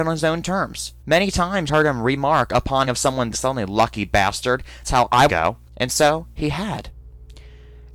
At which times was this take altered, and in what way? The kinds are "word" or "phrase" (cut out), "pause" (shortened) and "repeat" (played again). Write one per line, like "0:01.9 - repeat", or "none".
0:01.0 - pause
0:01.7 - word
0:02.9 - word
0:03.3 - word
0:04.8 - word
0:05.3 - phrase
0:05.7 - pause